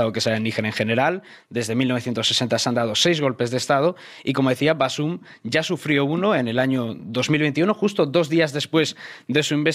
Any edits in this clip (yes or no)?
no